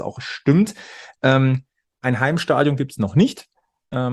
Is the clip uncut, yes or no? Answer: yes